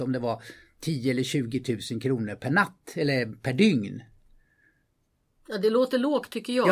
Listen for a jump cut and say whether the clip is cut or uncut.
uncut